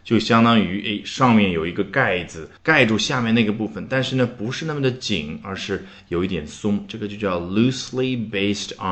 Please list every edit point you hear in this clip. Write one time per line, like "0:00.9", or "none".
0:02.6